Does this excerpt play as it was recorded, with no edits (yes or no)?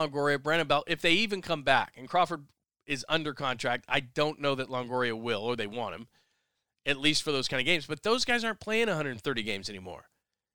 yes